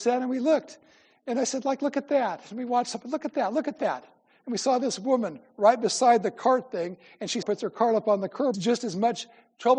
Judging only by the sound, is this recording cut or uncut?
cut